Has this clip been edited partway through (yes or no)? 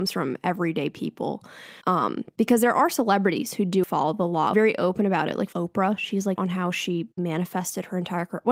yes